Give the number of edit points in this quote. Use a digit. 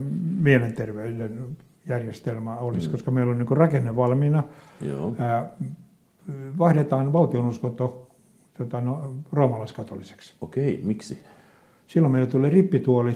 0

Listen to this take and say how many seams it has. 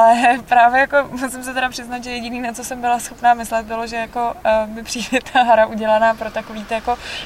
0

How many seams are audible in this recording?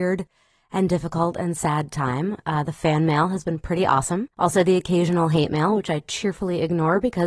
1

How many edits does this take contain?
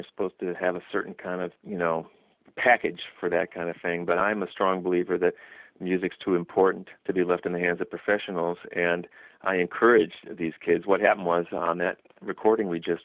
0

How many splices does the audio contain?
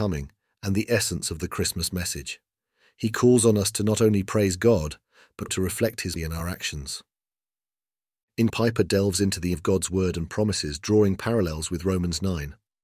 4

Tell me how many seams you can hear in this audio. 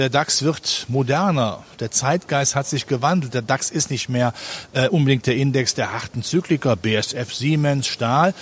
0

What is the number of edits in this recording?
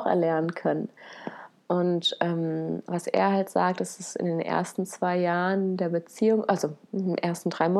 0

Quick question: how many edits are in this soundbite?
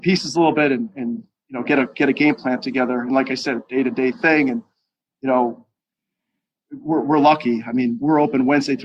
0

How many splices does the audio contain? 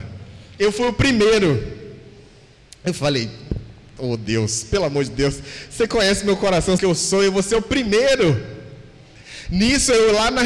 1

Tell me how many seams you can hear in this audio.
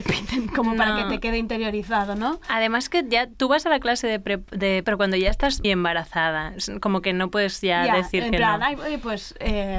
2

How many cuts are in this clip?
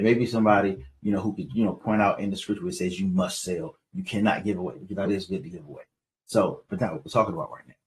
2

